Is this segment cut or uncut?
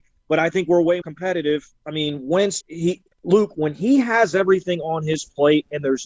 cut